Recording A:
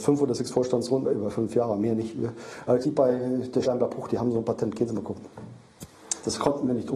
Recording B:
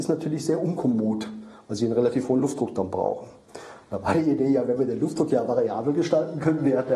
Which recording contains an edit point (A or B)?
A